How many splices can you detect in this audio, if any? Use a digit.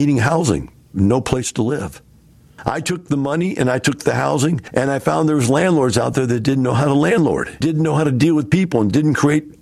1